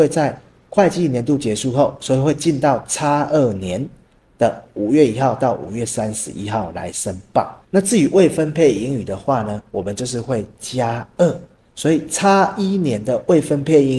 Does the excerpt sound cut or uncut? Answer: cut